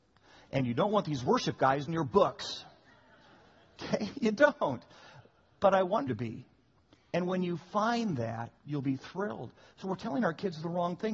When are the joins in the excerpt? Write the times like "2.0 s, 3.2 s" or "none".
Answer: 1.9 s, 6.1 s, 8.6 s

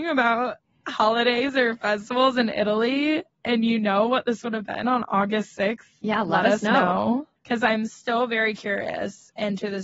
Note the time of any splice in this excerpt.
7.4 s

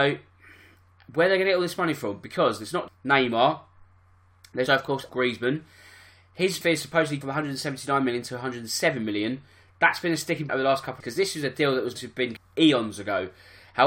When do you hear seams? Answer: 2.9 s, 4.7 s, 5.1 s, 6.6 s, 7.2 s, 10.5 s, 11.0 s, 12.0 s, 12.4 s

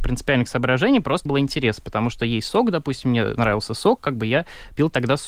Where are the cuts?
1.3 s

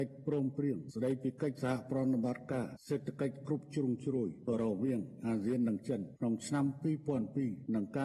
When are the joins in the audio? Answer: none

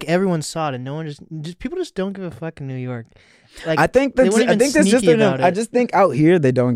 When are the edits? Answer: none

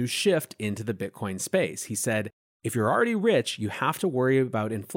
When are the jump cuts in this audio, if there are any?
none

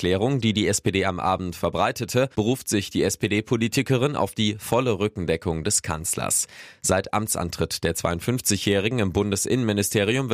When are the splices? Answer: 2.3 s

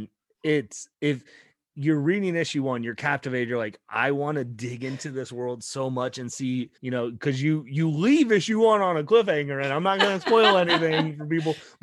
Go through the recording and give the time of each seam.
0.9 s, 6.8 s

